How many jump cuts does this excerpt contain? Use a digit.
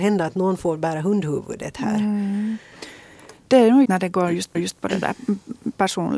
2